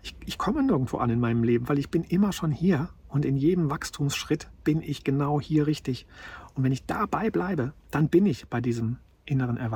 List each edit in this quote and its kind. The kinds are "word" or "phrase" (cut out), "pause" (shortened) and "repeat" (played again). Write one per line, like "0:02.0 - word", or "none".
0:04.6 - pause